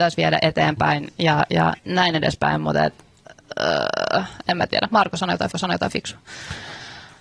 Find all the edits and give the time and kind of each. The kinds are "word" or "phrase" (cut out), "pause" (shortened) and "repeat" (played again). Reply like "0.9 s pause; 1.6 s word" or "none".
1.8 s pause; 5.5 s repeat